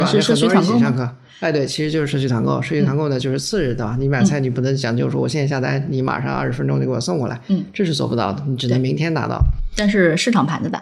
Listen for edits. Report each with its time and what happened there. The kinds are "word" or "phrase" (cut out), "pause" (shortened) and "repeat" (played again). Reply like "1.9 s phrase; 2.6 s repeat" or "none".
none